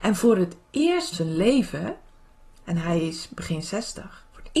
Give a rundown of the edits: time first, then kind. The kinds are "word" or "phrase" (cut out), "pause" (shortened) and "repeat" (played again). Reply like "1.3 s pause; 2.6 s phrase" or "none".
1.1 s word